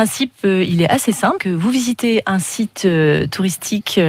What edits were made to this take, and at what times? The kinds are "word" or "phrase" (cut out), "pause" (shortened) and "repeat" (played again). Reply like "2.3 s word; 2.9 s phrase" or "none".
1.4 s word